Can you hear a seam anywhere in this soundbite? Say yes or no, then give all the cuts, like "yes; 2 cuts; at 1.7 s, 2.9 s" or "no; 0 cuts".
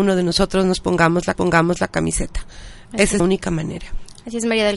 yes; 2 cuts; at 1.3 s, 3.2 s